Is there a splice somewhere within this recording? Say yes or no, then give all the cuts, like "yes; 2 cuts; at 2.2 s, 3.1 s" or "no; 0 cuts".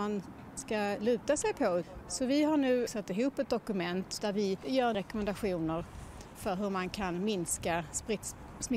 no; 0 cuts